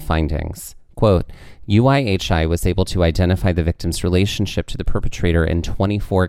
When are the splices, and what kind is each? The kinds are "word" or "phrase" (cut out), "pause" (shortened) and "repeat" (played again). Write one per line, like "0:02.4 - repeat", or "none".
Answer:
none